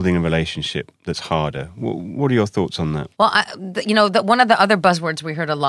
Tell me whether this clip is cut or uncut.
cut